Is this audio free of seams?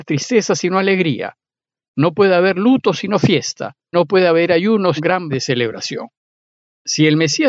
no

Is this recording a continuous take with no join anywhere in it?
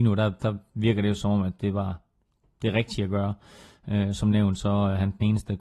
yes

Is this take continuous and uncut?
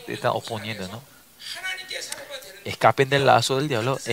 yes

